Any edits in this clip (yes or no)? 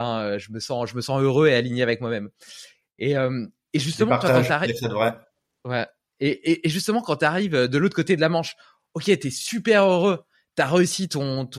no